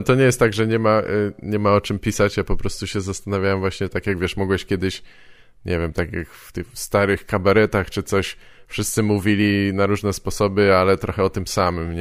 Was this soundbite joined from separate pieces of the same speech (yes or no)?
no